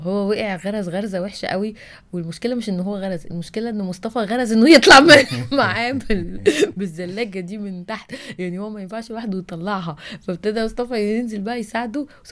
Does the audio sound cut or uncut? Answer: uncut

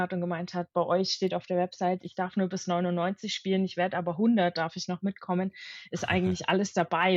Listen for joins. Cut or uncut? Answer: uncut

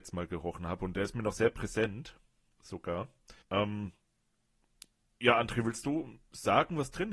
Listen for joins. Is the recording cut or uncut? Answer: cut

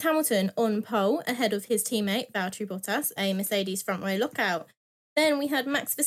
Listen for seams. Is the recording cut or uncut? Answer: cut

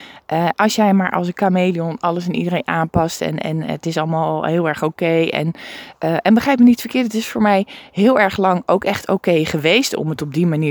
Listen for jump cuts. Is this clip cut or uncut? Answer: uncut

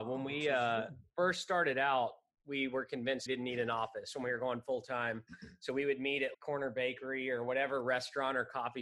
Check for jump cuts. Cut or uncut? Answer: cut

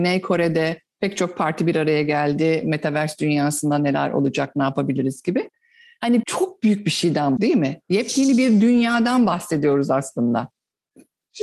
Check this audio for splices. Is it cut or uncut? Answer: cut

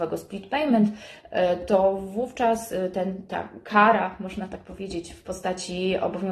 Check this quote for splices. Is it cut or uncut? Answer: uncut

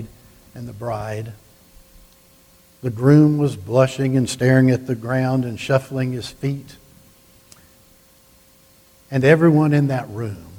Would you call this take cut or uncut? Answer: uncut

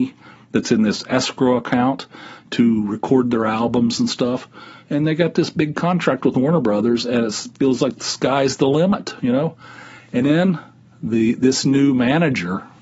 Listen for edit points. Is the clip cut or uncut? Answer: uncut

